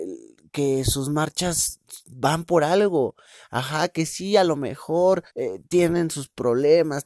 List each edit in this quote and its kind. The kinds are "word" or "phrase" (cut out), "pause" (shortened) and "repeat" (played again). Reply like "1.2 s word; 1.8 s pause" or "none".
5.3 s pause

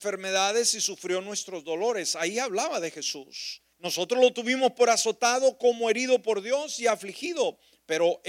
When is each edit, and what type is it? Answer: 3.7 s pause

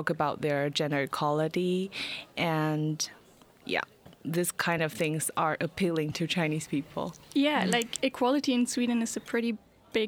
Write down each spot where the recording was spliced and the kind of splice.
none

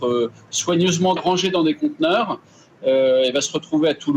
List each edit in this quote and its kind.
1.2 s word

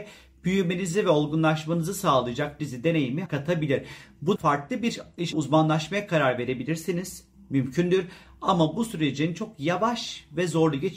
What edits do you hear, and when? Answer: 2.6 s word; 3.3 s word; 4.4 s word; 5.3 s word

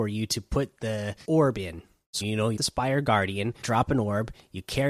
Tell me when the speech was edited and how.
1.2 s word; 2.2 s word; 2.6 s word; 3.6 s word

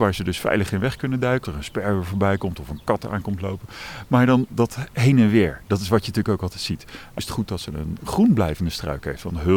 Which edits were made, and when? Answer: 1.4 s word; 4.5 s word; 7.2 s word

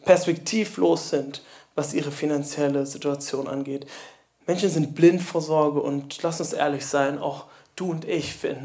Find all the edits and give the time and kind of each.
none

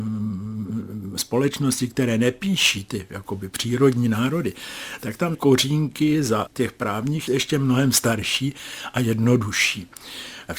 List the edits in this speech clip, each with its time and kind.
5.3 s word; 6.5 s word; 7.3 s word

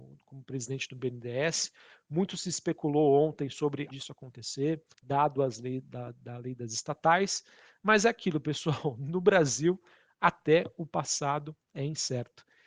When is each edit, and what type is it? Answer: 3.9 s phrase; 4.9 s pause

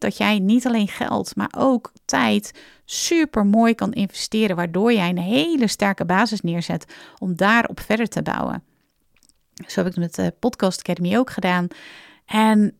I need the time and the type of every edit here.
none

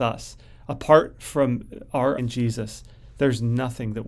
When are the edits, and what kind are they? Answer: 2.2 s word

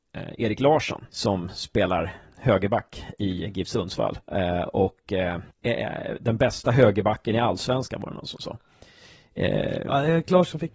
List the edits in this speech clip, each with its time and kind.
1.1 s pause; 4.2 s pause; 5.5 s pause

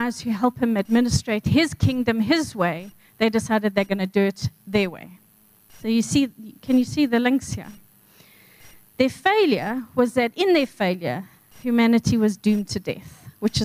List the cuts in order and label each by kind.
none

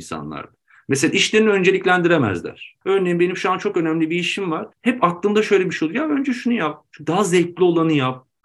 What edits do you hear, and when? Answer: 2.8 s pause; 4.7 s pause

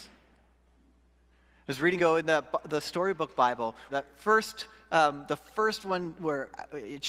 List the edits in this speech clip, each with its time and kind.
2.0 s phrase; 3.9 s word

